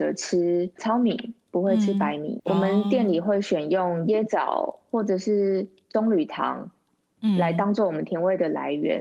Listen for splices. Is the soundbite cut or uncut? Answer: cut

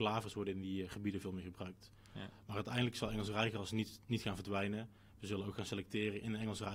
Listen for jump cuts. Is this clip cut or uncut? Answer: uncut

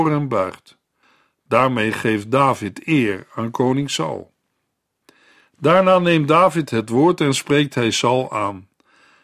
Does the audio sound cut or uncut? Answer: uncut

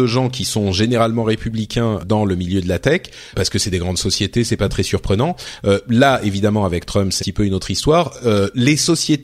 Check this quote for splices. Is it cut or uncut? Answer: cut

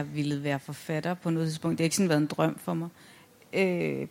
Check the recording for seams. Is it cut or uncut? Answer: uncut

